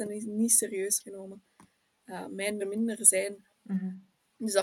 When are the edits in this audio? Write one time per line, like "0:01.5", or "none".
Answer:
0:01.0
0:02.6
0:03.5